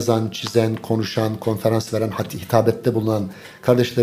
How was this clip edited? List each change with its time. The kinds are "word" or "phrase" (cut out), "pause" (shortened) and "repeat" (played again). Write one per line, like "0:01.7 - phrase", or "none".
none